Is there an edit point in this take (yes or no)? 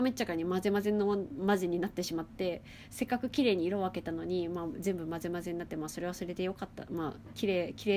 no